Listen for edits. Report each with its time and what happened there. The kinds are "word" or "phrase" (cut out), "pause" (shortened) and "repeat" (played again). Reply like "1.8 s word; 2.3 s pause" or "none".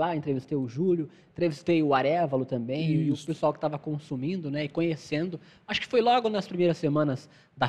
none